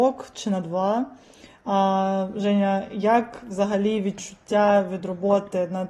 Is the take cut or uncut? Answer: uncut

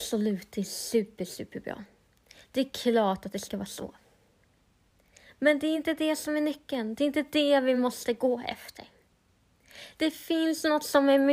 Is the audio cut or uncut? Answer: uncut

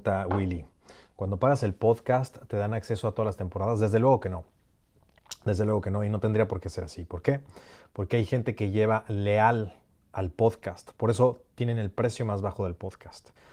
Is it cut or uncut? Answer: uncut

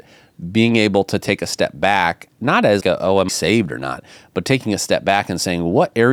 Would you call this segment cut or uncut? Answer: cut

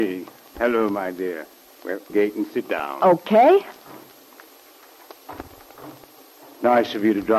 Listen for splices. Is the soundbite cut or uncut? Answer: cut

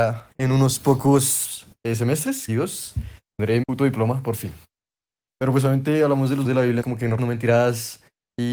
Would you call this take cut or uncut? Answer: cut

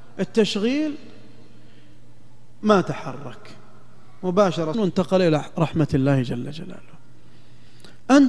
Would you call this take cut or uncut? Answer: cut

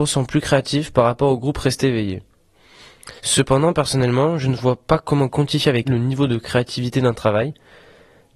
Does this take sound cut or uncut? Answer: cut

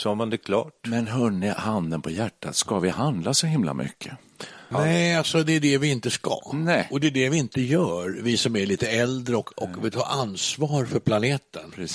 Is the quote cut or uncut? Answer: cut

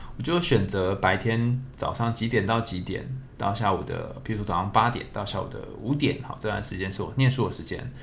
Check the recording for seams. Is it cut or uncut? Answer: uncut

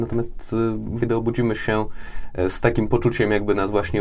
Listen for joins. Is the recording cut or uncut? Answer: cut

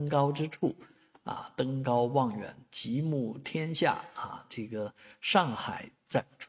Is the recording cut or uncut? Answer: uncut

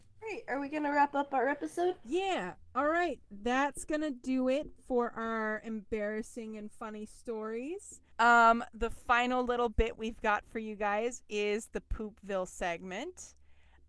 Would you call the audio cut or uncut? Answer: cut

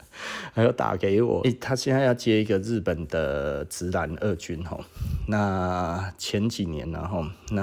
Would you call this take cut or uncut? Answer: cut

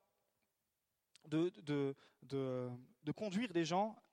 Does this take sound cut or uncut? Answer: cut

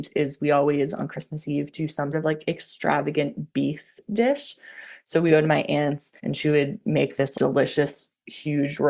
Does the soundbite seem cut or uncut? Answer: cut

